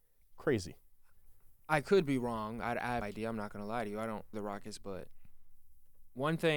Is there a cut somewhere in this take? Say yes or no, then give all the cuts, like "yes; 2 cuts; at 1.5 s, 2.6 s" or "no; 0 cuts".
yes; 2 cuts; at 3.0 s, 4.3 s